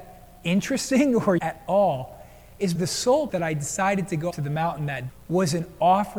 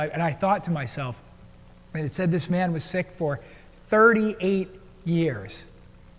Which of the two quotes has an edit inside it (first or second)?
first